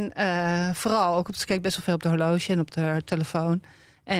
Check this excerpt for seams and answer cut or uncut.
uncut